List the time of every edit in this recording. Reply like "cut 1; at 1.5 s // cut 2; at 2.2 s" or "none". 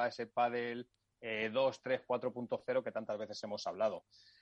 none